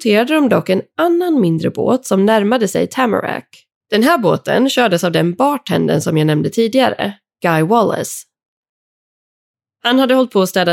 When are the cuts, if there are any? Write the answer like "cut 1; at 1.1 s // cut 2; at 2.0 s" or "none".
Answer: cut 1; at 3.8 s